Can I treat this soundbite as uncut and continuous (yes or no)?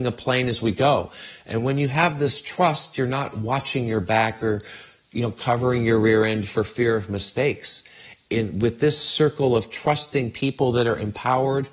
yes